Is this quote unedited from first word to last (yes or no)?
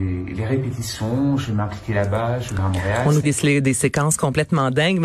no